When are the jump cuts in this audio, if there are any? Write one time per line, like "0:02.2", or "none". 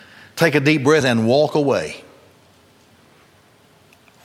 0:01.0